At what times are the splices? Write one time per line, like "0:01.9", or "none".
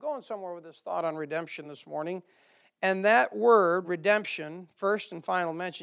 none